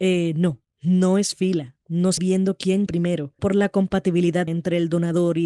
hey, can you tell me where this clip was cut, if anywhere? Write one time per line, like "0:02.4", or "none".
0:01.3
0:02.2
0:02.9
0:03.4
0:04.5